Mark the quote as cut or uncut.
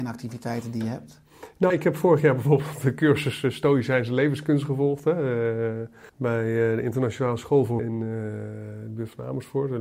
cut